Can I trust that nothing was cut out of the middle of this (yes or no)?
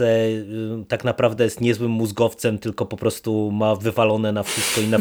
yes